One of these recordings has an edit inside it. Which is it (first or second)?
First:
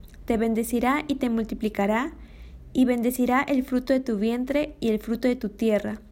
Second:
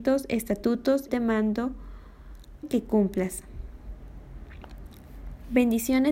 second